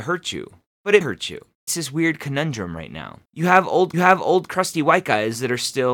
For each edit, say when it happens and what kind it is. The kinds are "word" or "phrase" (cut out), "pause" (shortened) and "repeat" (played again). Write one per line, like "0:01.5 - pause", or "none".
0:01.0 - word
0:01.7 - word
0:03.2 - pause
0:03.9 - repeat